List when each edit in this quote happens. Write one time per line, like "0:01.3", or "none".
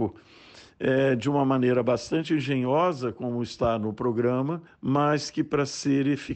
0:04.7